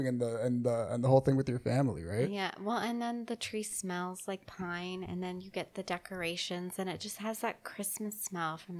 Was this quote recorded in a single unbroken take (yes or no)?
yes